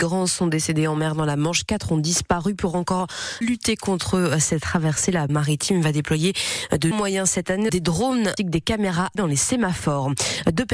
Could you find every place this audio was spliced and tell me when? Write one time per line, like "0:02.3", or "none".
0:03.4
0:05.3
0:06.9
0:07.7
0:08.4
0:09.2